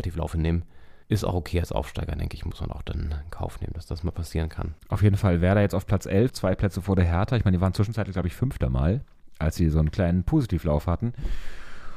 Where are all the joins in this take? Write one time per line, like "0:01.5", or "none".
0:01.0
0:04.8
0:06.3